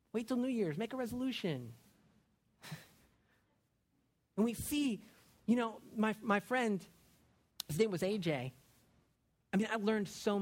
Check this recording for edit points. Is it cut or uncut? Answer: uncut